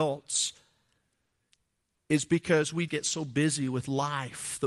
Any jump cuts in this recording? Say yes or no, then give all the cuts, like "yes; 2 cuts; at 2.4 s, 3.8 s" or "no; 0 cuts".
yes; 1 cut; at 2.9 s